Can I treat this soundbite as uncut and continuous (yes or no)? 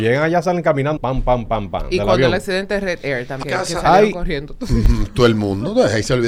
no